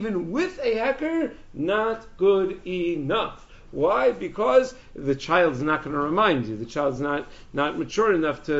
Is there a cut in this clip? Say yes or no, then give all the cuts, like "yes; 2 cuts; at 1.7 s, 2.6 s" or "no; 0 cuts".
no; 0 cuts